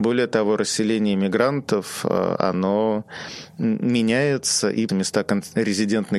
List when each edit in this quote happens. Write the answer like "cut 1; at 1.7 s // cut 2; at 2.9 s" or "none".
cut 1; at 4.9 s